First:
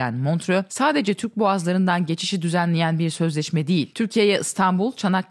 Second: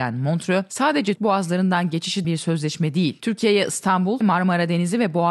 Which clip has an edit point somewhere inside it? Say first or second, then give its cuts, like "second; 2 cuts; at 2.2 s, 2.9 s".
second; 3 cuts; at 1.2 s, 2.2 s, 4.2 s